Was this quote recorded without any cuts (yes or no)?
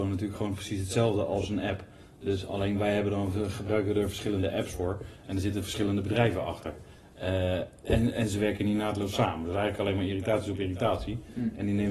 yes